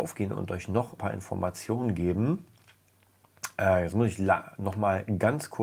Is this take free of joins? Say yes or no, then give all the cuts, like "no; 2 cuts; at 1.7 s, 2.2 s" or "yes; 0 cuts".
no; 1 cut; at 1.0 s